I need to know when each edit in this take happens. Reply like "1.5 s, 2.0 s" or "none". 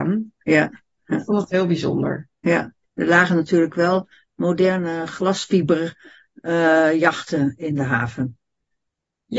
none